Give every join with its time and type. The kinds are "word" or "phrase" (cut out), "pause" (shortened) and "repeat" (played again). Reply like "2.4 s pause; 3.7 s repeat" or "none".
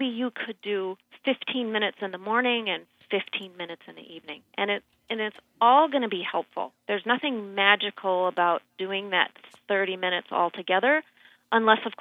none